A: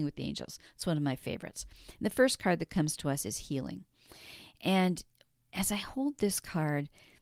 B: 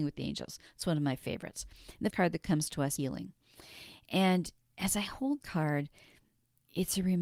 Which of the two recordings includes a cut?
B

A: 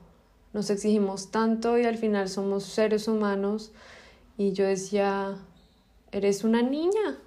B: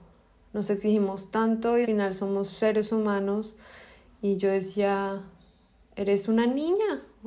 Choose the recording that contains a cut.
B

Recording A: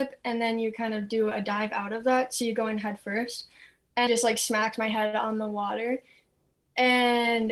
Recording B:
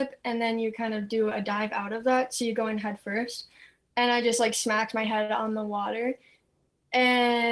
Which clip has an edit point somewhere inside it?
A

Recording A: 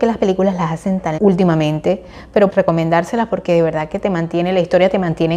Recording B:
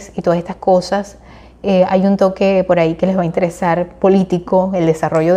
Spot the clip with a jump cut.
A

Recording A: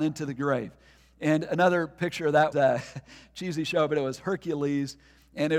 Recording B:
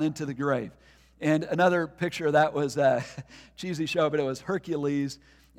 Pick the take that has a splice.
A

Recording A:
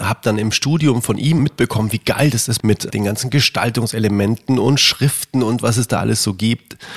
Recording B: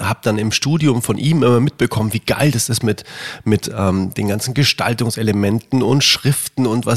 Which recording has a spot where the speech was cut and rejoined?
A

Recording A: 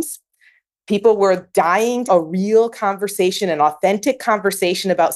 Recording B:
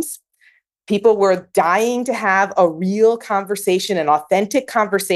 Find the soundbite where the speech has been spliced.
A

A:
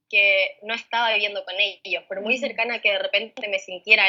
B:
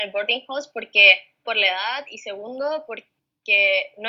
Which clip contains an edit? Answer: B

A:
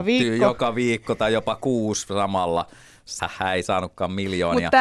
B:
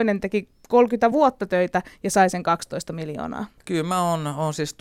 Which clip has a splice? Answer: A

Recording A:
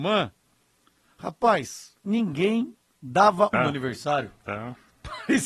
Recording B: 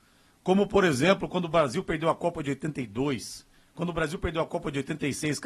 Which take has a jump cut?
A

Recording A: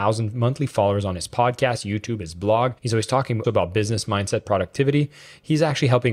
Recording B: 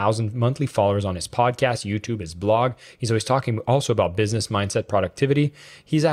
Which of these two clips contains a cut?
A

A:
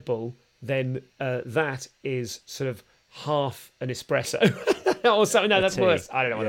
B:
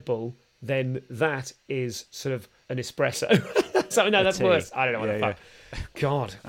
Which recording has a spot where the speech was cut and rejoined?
B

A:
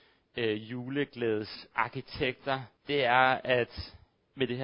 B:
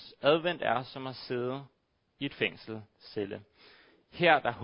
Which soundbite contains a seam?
A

